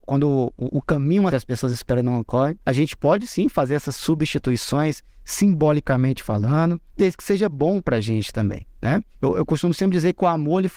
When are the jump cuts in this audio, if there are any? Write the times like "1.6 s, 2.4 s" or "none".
1.3 s, 2.6 s, 6.9 s, 9.1 s